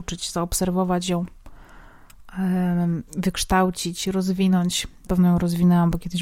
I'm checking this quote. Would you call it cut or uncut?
cut